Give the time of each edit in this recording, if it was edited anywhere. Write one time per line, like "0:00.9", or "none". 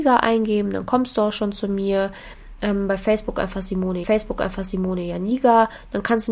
0:04.0